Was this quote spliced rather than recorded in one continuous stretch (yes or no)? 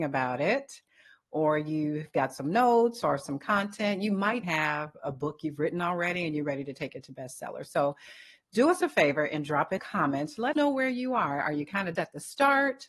yes